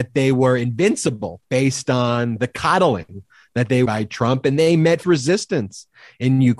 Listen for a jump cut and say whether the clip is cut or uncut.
cut